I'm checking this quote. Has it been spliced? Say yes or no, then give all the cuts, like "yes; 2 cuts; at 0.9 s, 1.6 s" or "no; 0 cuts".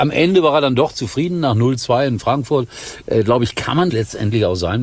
yes; 1 cut; at 3.9 s